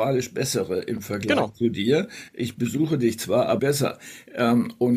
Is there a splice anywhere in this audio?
yes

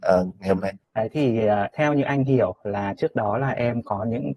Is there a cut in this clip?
no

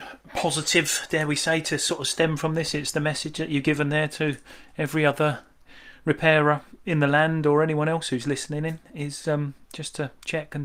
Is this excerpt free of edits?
yes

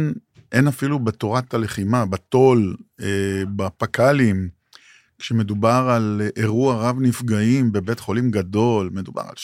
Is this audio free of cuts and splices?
yes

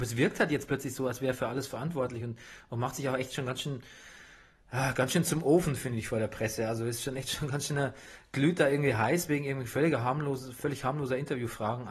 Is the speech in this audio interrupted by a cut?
no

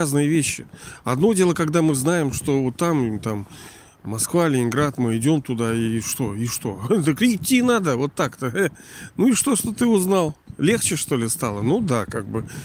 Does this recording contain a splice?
no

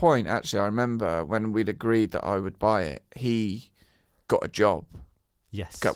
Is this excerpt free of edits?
yes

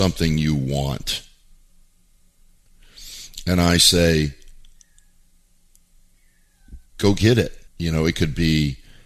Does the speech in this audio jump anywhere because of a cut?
yes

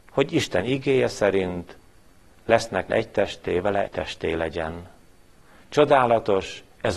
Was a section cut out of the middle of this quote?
yes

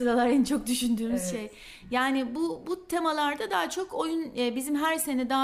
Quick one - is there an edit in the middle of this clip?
no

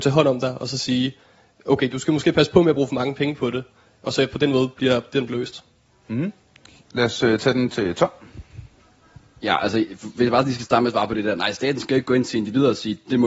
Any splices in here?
yes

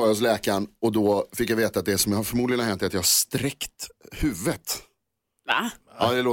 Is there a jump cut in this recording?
no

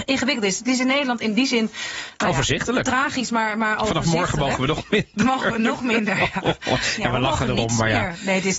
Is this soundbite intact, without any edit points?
yes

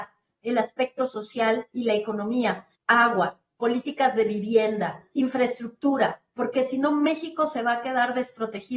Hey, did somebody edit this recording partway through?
yes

